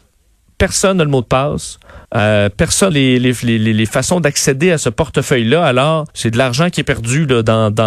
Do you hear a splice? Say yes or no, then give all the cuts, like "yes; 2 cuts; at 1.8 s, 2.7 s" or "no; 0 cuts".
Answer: yes; 3 cuts; at 2.0 s, 2.9 s, 6.1 s